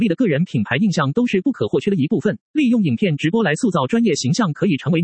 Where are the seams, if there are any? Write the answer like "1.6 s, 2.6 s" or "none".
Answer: 2.5 s